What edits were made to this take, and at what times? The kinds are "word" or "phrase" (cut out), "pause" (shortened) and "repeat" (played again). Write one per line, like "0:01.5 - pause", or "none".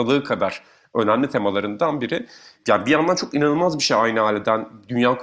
none